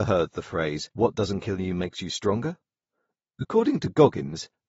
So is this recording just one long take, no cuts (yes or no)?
no